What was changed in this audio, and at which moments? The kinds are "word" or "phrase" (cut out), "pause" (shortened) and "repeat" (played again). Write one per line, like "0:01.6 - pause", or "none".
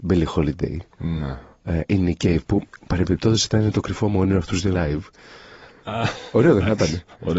0:04.7 - phrase